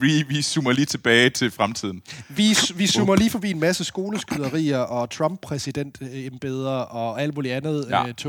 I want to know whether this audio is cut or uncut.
uncut